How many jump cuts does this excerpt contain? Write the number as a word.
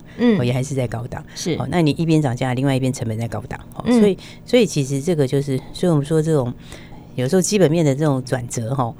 zero